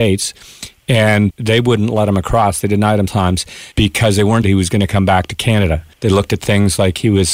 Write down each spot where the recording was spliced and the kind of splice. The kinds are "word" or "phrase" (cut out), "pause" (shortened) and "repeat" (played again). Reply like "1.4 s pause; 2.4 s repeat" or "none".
1.3 s word; 3.1 s word; 3.7 s pause; 4.4 s word; 5.9 s pause